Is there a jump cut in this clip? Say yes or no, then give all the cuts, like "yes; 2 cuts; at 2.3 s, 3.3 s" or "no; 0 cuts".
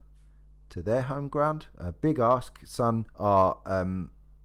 yes; 1 cut; at 3.1 s